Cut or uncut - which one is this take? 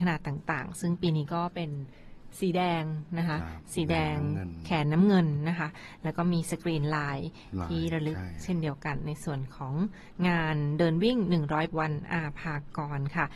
cut